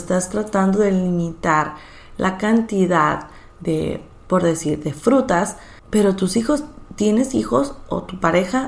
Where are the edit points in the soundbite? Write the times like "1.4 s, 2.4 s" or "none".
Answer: 5.8 s